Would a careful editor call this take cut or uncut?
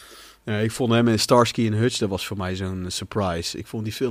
uncut